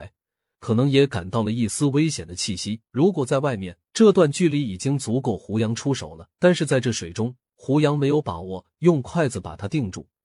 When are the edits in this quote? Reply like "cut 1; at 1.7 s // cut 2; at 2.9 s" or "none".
cut 1; at 2.9 s // cut 2; at 3.9 s // cut 3; at 6.3 s // cut 4; at 7.5 s